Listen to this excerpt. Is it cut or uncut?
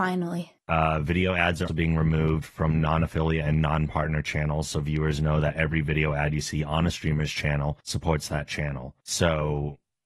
cut